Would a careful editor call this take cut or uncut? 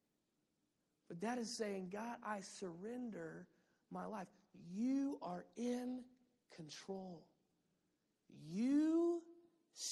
uncut